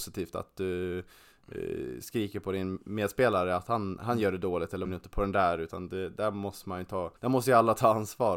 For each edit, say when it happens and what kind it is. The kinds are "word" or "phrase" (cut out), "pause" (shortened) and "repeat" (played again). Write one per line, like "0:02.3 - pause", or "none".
0:04.8 - phrase
0:07.2 - pause

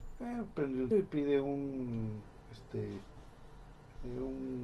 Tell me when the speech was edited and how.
0:00.9 - word

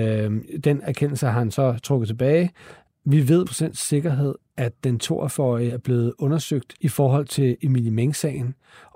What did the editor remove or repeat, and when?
0:03.4 - word
0:06.8 - pause

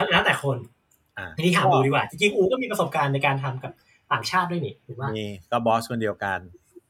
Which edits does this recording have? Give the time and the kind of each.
none

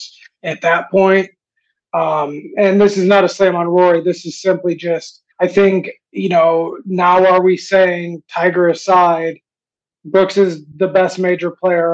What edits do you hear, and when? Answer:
0:05.3 - pause

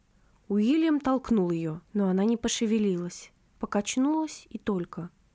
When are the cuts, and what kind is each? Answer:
0:01.8 - pause

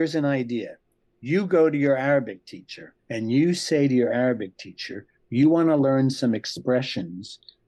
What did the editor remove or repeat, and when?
0:03.0 - pause

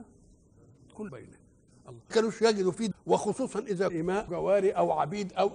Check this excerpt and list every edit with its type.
0:01.1 - word
0:02.1 - word
0:02.9 - word
0:03.9 - word
0:04.3 - word

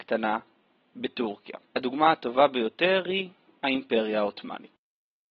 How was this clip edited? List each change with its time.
none

